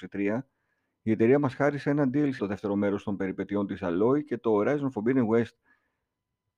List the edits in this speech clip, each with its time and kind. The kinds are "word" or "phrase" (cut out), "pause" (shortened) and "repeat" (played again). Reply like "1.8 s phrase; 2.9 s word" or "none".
2.4 s word